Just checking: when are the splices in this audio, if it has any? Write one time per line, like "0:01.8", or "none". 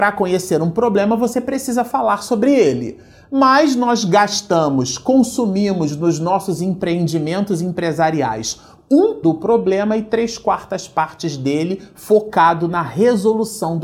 0:09.2